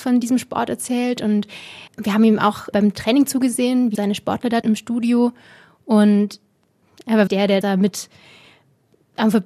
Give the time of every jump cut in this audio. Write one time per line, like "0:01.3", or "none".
0:01.9
0:02.7
0:03.9
0:04.6
0:07.3
0:07.6